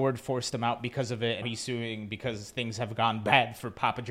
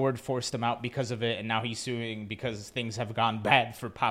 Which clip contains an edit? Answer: first; 1 cut; at 1.4 s

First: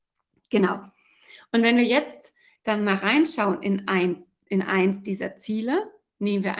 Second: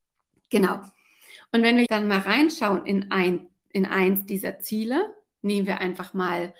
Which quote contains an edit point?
second; 1 cut; at 1.9 s

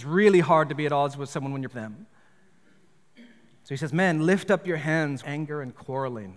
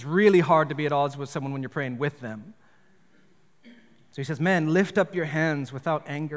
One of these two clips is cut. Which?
first; 2 cuts; at 1.7 s, 5.2 s

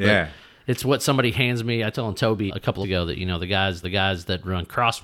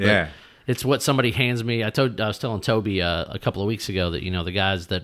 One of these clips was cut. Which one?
first; 4 cuts; at 1.9 s, 2.5 s, 2.8 s, 3.8 s

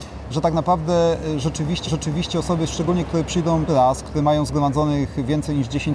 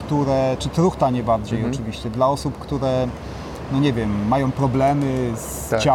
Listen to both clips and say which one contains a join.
first; 2 cuts; at 1.9 s, 3.7 s

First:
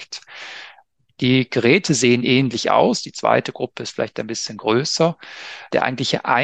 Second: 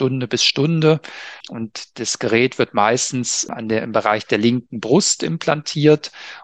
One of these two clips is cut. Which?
second; 1 cut; at 1.4 s

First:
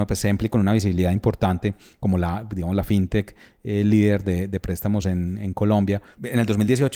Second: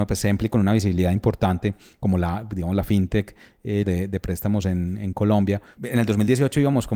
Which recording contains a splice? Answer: second; 1 cut; at 3.8 s

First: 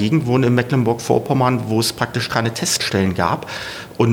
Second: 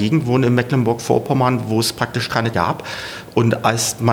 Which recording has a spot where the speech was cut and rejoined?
second; 1 cut; at 2.5 s

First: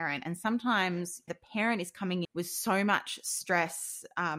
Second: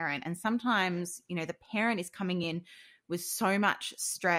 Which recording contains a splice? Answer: first; 2 cuts; at 1.3 s, 2.2 s

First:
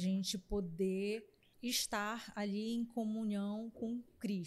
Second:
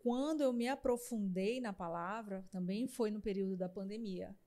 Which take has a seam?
first; 1 cut; at 1.5 s

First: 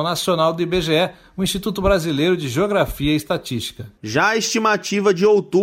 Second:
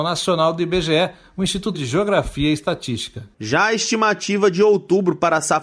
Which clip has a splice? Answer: second; 1 cut; at 1.7 s

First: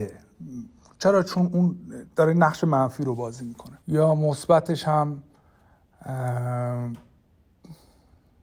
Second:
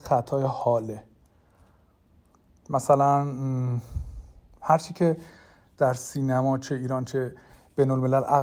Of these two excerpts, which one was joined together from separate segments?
first; 2 cuts; at 2.1 s, 3.8 s

